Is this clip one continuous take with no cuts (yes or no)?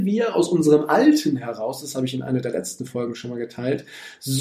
yes